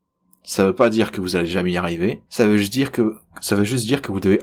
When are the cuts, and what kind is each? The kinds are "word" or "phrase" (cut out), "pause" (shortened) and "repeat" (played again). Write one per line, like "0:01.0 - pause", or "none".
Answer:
0:02.3 - pause